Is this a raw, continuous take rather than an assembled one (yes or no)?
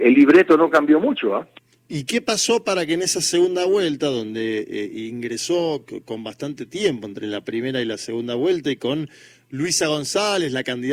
yes